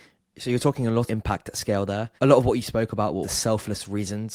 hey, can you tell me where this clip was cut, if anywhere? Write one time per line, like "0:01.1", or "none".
0:01.1
0:02.2
0:03.2